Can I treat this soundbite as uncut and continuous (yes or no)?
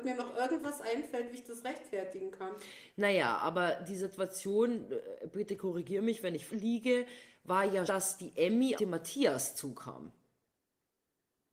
no